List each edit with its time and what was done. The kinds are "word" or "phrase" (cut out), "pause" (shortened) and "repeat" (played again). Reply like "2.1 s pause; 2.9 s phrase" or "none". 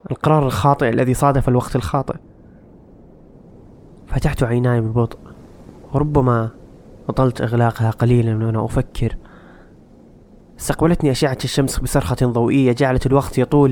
none